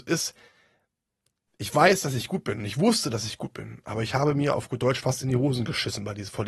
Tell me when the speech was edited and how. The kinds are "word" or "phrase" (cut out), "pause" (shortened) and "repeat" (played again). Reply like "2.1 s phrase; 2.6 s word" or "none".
none